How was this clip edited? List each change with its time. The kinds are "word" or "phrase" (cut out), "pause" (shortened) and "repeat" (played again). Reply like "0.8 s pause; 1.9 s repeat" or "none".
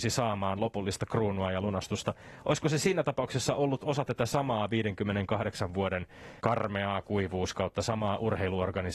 6.4 s pause